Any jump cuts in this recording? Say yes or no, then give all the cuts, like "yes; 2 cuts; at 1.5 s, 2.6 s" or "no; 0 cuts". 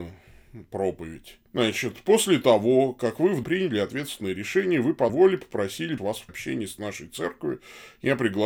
yes; 5 cuts; at 1.5 s, 3.4 s, 5.1 s, 6.0 s, 6.3 s